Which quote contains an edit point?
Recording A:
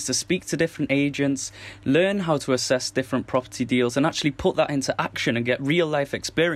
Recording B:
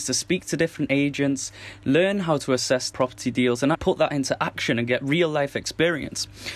B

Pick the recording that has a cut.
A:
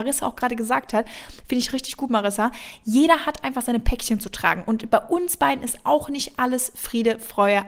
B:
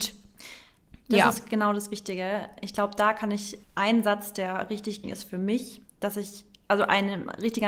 B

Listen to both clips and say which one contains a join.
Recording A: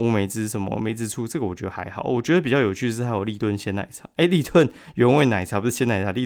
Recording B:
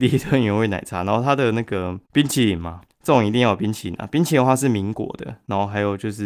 B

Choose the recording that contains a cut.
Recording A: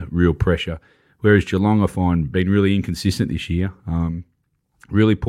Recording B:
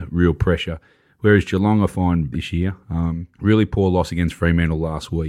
B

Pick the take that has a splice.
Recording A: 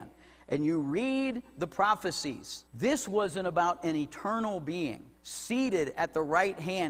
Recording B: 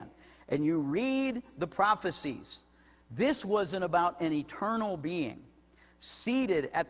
A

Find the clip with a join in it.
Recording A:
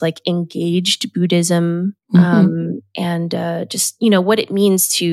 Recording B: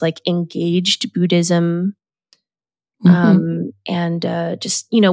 A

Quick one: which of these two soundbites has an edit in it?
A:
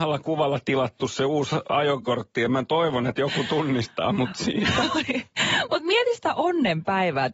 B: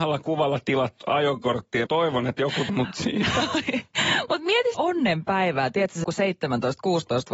B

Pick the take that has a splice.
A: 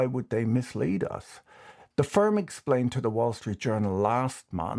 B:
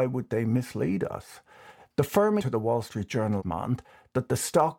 B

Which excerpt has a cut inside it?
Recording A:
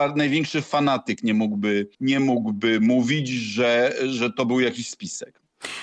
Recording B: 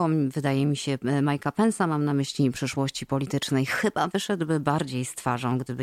A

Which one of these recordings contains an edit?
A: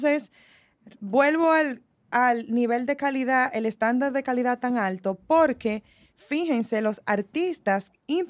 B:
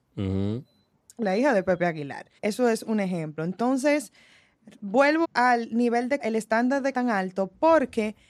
B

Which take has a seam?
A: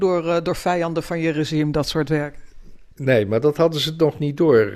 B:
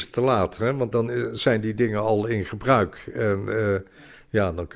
B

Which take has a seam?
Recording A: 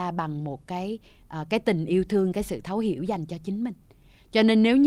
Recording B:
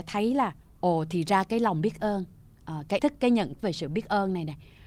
B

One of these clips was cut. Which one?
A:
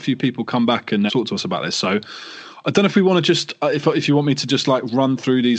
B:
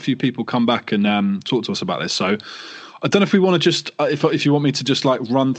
A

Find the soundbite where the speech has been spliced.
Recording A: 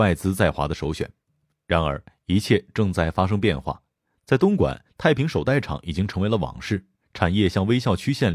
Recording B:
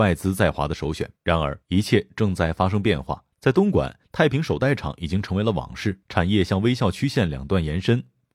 B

